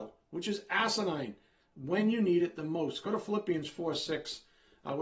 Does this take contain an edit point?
no; 0 cuts

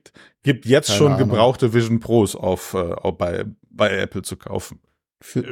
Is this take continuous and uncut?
yes; 0 cuts

